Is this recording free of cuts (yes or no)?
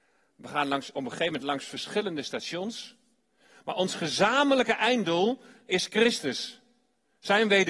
yes